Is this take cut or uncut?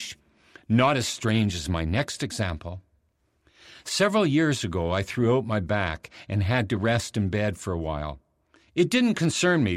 uncut